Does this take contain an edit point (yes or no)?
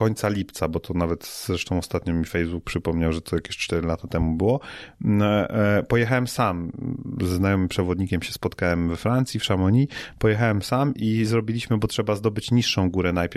no